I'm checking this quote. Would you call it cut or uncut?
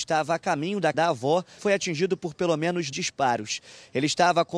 cut